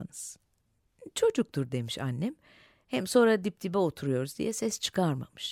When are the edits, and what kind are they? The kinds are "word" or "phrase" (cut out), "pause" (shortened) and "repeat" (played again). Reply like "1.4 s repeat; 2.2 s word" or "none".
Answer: none